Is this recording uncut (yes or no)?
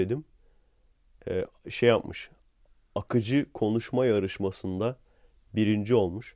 yes